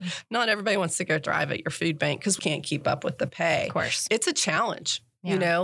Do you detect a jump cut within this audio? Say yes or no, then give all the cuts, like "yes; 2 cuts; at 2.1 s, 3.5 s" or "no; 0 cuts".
yes; 1 cut; at 2.4 s